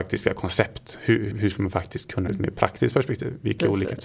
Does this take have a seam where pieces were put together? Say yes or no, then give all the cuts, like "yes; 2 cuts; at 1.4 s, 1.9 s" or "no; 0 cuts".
yes; 2 cuts; at 1.3 s, 2.3 s